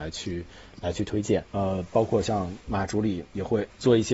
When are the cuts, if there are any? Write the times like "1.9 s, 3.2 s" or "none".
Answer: 1.5 s